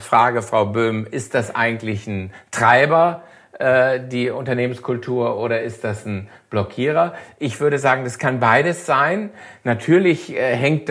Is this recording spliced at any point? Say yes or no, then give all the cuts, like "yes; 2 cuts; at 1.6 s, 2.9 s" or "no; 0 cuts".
no; 0 cuts